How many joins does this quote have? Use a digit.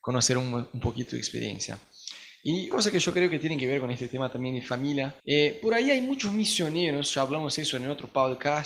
3